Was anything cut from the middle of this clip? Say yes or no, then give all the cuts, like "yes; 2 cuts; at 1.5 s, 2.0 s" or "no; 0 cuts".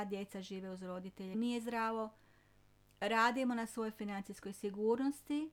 yes; 1 cut; at 1.3 s